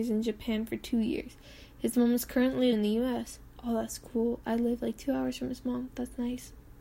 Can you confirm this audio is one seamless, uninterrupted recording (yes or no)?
no